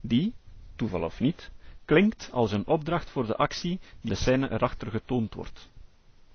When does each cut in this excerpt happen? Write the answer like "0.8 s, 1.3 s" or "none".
4.1 s